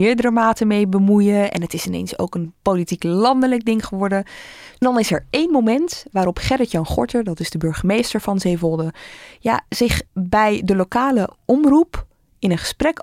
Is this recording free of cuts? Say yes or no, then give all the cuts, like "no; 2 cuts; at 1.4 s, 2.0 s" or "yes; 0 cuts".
no; 1 cut; at 10.1 s